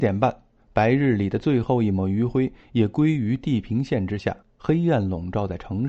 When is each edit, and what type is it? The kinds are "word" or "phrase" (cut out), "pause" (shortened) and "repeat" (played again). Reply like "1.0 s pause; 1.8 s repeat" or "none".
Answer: 4.4 s pause